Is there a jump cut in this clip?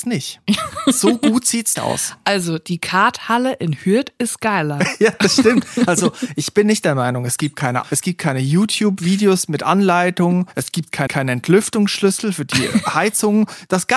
yes; 3 cuts; at 1.8 s, 7.8 s, 11.1 s

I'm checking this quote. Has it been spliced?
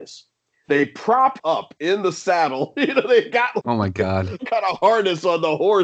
yes; 3 cuts; at 1.4 s, 3.6 s, 4.4 s

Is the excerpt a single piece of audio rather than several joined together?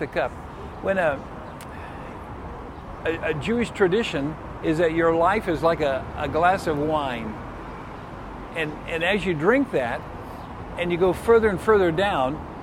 yes; 0 cuts

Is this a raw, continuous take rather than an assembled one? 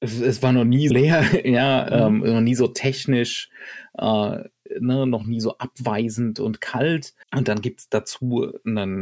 no; 3 cuts; at 0.9 s, 5.2 s, 7.2 s

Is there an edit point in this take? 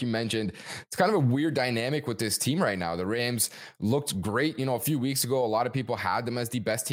no; 0 cuts

